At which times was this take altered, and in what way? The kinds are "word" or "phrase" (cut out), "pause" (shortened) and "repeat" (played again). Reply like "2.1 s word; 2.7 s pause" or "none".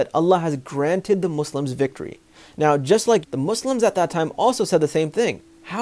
3.2 s phrase

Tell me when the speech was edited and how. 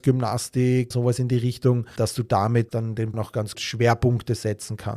0.9 s word; 2.0 s word; 2.7 s word; 3.1 s word; 3.5 s word

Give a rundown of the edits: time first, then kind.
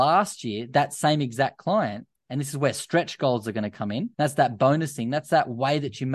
4.1 s pause

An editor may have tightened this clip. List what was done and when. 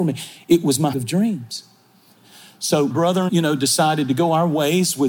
0.9 s word; 2.9 s word; 3.3 s word

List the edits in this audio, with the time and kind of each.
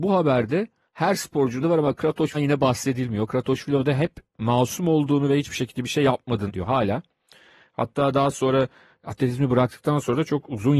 1.6 s word; 2.3 s word; 6.5 s word

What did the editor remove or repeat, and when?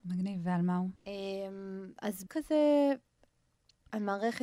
1.0 s pause; 2.3 s word

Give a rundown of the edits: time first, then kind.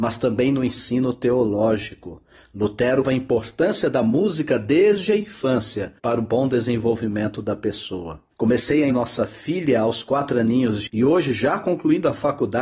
3.0 s word; 6.0 s pause; 8.3 s pause; 8.9 s word; 10.9 s word

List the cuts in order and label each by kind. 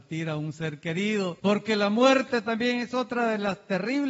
1.4 s pause

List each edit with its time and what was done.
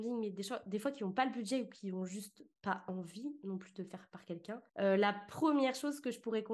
4.7 s pause

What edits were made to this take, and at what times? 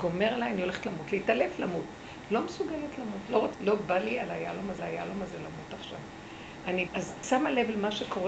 3.5 s word; 4.8 s repeat; 6.9 s word; 7.2 s phrase

